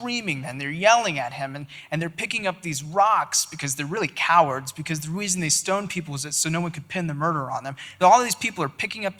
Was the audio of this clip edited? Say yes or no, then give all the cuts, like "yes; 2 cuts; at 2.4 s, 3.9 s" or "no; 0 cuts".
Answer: yes; 1 cut; at 8.0 s